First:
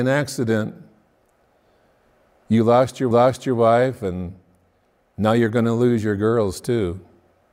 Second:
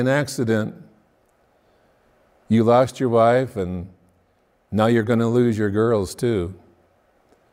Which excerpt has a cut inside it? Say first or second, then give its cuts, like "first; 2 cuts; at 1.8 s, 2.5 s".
first; 1 cut; at 3.1 s